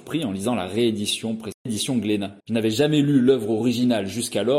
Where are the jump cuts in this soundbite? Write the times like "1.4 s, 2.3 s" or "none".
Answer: 2.4 s